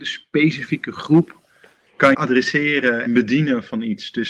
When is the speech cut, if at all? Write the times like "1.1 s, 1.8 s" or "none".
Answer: 2.1 s, 3.1 s

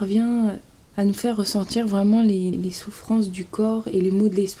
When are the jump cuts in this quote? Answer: 2.5 s

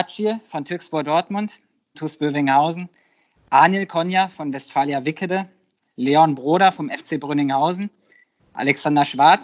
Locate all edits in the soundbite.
1.9 s

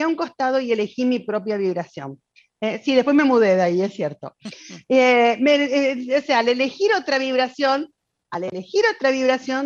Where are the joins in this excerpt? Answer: 2.3 s

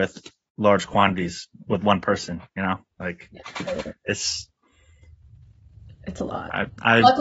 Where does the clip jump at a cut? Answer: none

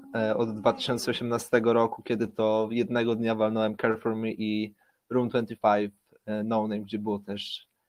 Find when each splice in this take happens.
none

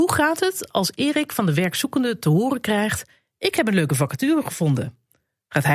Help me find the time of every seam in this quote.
none

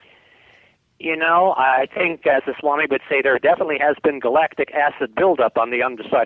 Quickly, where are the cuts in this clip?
none

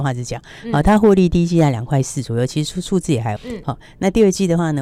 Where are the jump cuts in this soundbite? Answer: 3.4 s

